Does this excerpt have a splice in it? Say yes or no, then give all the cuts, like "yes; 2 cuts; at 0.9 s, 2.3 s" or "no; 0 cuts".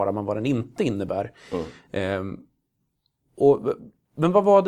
no; 0 cuts